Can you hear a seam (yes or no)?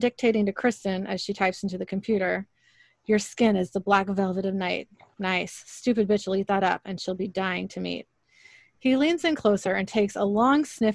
no